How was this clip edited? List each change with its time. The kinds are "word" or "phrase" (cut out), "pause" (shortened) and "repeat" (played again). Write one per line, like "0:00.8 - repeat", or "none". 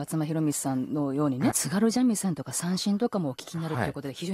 0:01.5 - phrase